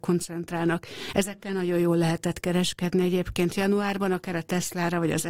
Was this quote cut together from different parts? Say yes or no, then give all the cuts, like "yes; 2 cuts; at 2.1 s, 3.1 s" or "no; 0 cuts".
no; 0 cuts